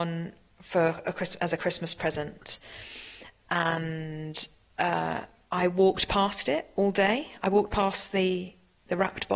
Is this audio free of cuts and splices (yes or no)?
yes